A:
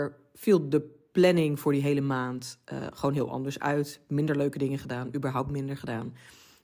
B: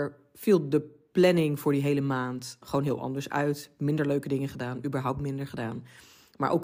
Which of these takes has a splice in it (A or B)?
B